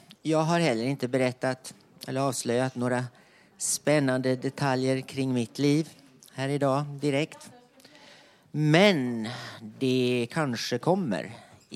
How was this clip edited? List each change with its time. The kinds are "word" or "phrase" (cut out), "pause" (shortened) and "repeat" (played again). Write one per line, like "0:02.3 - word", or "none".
none